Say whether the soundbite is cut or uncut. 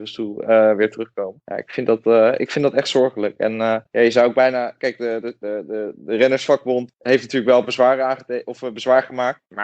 uncut